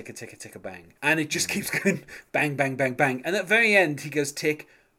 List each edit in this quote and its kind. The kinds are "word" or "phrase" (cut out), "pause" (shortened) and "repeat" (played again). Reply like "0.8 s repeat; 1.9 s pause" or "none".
1.0 s pause